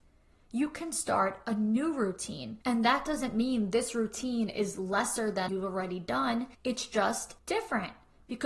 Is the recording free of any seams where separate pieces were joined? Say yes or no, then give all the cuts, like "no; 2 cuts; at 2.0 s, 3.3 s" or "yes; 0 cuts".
no; 4 cuts; at 2.6 s, 5.5 s, 6.5 s, 7.4 s